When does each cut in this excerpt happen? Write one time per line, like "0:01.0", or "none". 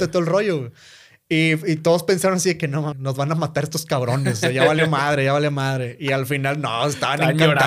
0:02.9